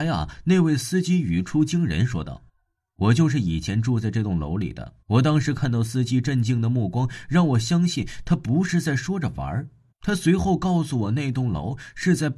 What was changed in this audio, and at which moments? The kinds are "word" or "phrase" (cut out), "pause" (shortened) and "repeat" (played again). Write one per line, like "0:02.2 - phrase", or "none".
0:02.5 - pause
0:05.0 - pause
0:09.9 - pause